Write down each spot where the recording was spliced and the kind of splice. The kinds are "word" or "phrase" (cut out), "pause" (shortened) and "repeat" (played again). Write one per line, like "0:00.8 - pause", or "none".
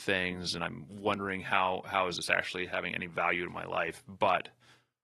none